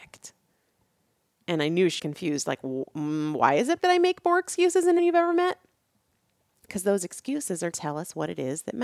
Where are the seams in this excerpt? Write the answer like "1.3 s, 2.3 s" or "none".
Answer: 2.0 s, 3.8 s, 5.0 s, 7.7 s